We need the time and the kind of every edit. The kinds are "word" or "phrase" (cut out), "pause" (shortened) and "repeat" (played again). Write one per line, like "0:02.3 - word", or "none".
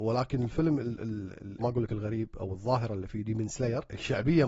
0:01.6 - phrase

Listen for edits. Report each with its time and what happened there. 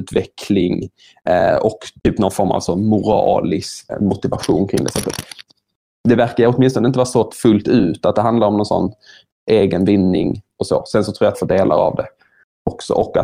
0:02.0 - pause
0:03.9 - word
0:09.3 - word
0:11.3 - phrase

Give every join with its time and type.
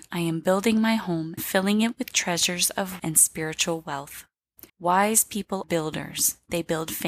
0:01.4 - word
0:03.0 - word
0:04.7 - pause
0:05.6 - word

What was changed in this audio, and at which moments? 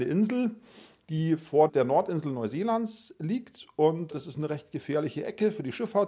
0:04.1 - word

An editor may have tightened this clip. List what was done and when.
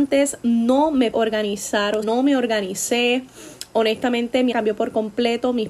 0:01.1 - word
0:02.0 - word
0:04.5 - word

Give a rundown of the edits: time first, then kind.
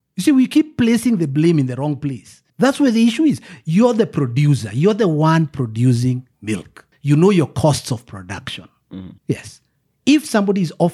0:02.5 - pause
0:06.3 - pause
0:09.2 - pause

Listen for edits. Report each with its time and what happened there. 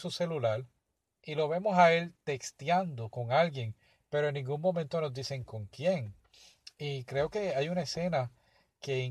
none

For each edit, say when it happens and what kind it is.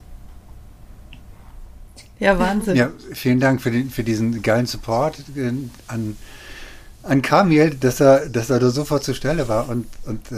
none

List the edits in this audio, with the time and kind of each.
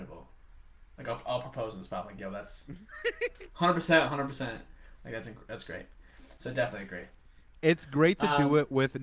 none

